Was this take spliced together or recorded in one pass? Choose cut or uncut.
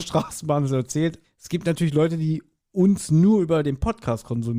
cut